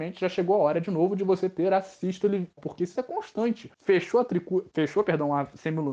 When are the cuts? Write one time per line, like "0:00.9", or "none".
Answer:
0:02.6
0:03.0
0:03.7

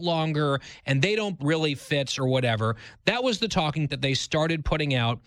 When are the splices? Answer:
0:01.4
0:03.9

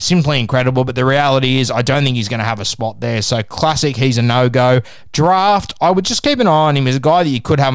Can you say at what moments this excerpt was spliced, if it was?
none

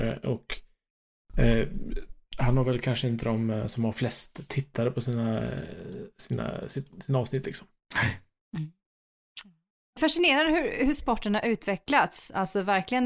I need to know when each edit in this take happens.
0:10.0

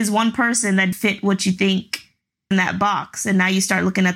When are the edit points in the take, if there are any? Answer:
0:00.9
0:02.5

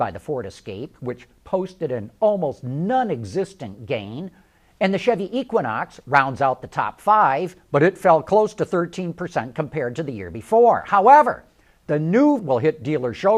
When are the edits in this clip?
0:12.4

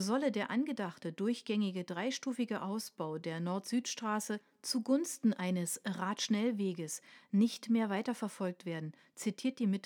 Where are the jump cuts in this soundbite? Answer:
none

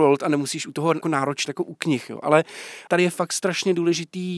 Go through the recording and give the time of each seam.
0:01.0
0:01.5
0:02.9

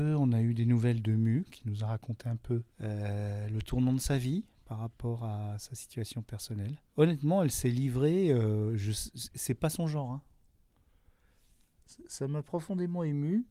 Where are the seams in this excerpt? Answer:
0:02.7
0:04.5
0:06.9

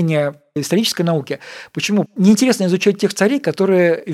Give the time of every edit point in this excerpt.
none

